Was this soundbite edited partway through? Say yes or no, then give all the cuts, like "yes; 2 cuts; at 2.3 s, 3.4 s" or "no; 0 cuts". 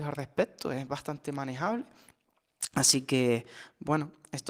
no; 0 cuts